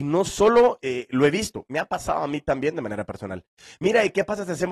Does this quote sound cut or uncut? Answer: uncut